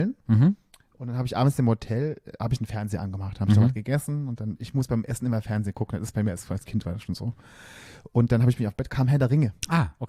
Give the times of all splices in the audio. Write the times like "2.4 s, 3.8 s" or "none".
8.9 s